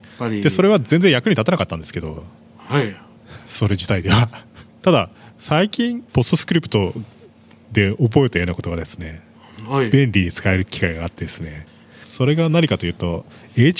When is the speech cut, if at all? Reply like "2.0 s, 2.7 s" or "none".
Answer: 6.1 s